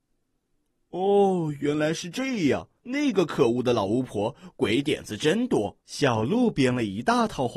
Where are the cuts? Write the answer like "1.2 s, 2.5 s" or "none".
2.8 s, 5.8 s